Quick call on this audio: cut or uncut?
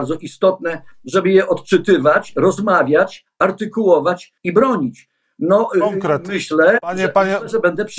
cut